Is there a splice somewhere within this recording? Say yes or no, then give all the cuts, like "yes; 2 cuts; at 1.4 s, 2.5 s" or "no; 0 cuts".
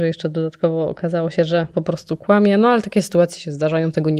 yes; 1 cut; at 1.7 s